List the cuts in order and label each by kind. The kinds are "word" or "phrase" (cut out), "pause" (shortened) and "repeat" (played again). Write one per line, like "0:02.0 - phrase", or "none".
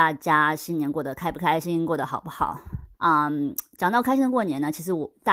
0:02.9 - pause